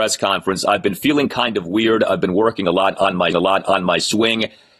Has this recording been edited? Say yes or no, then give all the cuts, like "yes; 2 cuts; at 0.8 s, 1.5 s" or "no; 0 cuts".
yes; 1 cut; at 3.3 s